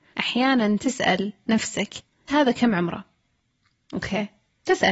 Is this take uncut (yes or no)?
no